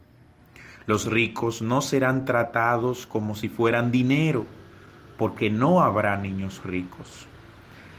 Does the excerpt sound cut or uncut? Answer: cut